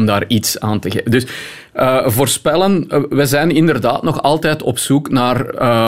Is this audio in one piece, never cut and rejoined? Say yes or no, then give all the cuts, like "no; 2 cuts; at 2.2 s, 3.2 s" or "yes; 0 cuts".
yes; 0 cuts